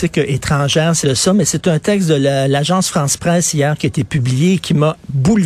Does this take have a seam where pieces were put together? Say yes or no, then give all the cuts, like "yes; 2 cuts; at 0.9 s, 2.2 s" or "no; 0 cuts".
yes; 1 cut; at 1.0 s